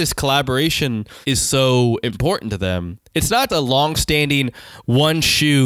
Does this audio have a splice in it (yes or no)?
yes